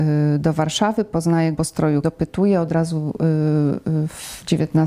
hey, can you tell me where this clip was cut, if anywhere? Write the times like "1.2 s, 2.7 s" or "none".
1.5 s, 2.0 s